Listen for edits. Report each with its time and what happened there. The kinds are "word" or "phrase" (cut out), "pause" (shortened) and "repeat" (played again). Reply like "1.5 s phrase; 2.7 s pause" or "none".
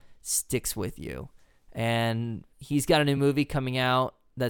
none

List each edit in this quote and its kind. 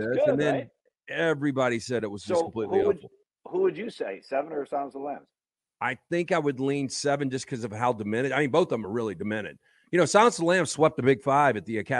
none

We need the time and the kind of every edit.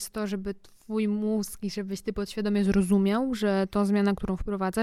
none

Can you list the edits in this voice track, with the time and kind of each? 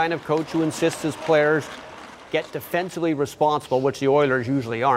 2.3 s pause

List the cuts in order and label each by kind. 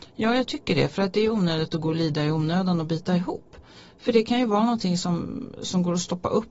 none

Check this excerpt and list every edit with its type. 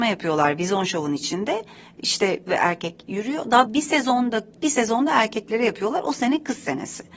2.5 s word; 3.7 s word; 4.5 s word

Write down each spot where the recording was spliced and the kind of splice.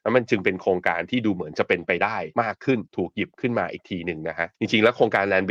2.3 s pause; 2.9 s pause; 4.5 s pause

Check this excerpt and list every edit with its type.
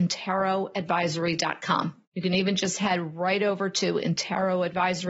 2.1 s pause

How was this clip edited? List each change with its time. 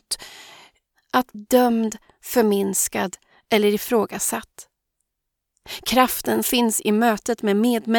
0.9 s word; 1.3 s word; 6.4 s word

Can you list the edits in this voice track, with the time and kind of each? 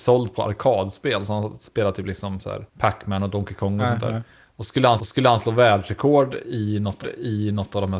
2.7 s pause; 5.0 s repeat; 7.0 s repeat

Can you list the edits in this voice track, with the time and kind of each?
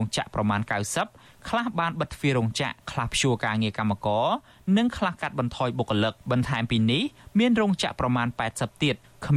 2.8 s pause; 6.2 s pause

